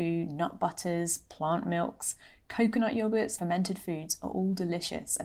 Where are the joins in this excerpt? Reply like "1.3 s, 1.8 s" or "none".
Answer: 3.4 s